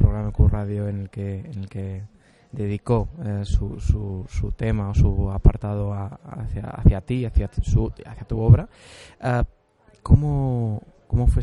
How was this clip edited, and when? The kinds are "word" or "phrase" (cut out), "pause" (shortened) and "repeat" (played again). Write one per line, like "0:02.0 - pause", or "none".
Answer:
none